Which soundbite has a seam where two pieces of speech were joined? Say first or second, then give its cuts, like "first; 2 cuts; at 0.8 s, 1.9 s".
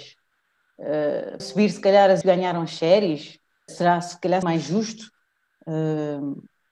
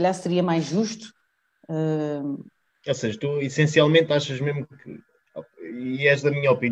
first; 4 cuts; at 1.4 s, 2.2 s, 3.7 s, 4.4 s